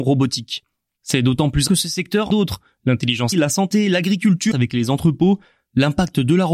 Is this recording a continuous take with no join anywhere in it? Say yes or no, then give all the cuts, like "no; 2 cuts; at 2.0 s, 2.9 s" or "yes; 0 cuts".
no; 4 cuts; at 1.7 s, 2.3 s, 3.3 s, 4.5 s